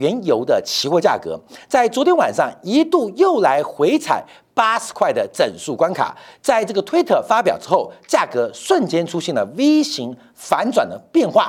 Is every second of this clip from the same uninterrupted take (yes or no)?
yes